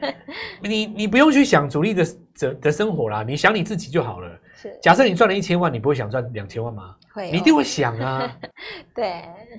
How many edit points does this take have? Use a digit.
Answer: 1